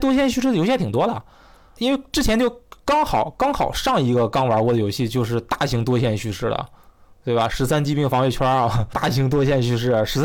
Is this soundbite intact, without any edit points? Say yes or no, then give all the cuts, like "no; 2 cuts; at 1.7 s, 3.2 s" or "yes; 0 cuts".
no; 2 cuts; at 1.8 s, 8.9 s